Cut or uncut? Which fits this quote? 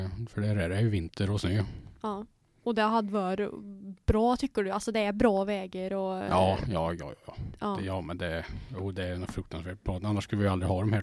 uncut